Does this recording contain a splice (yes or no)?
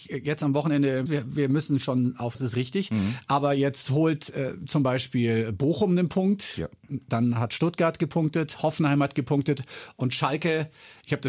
yes